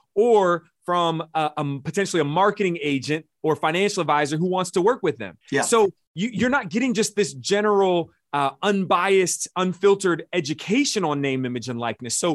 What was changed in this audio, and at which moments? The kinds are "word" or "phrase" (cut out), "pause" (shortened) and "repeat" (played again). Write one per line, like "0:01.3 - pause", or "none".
0:05.4 - pause